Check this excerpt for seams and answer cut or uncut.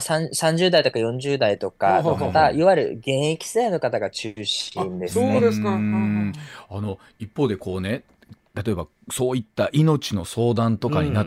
uncut